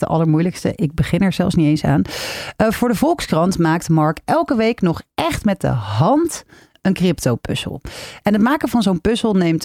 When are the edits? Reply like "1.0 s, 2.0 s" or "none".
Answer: none